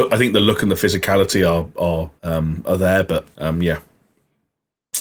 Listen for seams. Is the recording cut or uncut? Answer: cut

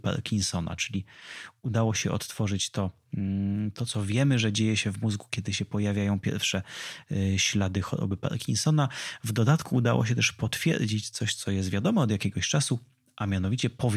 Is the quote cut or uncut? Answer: uncut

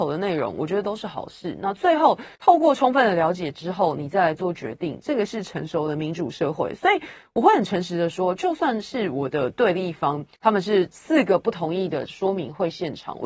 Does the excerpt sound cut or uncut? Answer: cut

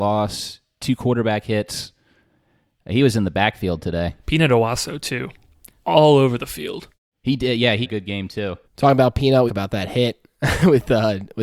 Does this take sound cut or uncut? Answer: cut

